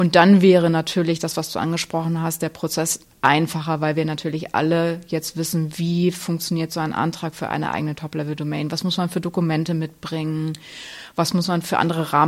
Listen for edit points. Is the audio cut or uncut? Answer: cut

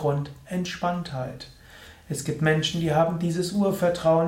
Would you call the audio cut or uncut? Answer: uncut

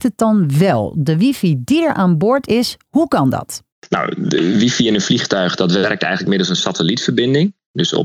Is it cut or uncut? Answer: uncut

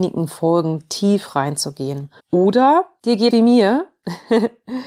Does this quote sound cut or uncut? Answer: cut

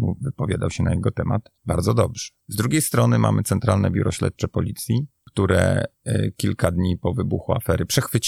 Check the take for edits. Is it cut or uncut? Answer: cut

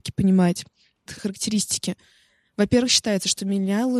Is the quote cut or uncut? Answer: cut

